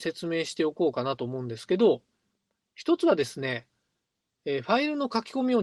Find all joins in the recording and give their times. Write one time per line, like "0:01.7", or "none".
none